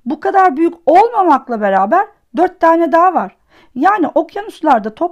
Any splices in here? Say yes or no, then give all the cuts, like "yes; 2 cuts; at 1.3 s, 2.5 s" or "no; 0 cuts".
no; 0 cuts